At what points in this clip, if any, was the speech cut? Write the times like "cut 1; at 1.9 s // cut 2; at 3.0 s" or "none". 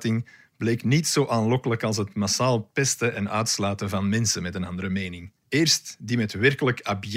cut 1; at 5.4 s